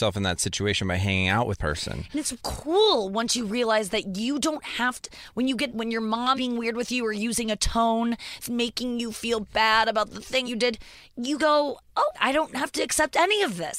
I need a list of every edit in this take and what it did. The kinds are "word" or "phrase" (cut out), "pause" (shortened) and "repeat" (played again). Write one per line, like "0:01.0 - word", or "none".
0:01.6 - word
0:02.4 - word
0:05.7 - word
0:06.3 - word
0:08.4 - word
0:10.4 - word
0:11.4 - word
0:12.1 - word